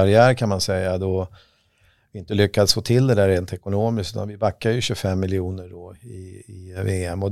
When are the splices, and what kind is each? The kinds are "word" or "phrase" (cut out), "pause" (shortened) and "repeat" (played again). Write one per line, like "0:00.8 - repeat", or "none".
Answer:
none